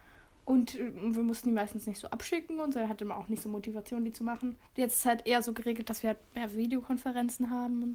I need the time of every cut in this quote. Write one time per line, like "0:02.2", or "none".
0:04.7